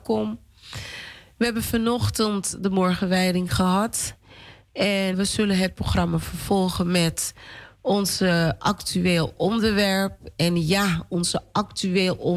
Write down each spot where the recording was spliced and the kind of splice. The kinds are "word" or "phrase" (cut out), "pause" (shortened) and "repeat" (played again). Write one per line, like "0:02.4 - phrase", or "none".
0:05.1 - word